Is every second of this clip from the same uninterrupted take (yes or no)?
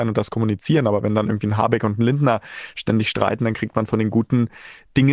yes